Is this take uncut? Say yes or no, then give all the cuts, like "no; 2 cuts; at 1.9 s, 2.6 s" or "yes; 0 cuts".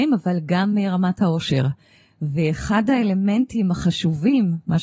yes; 0 cuts